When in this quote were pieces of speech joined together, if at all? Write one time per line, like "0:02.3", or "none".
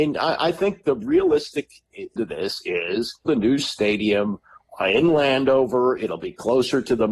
0:02.2
0:03.3